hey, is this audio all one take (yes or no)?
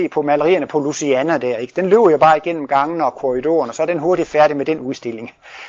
yes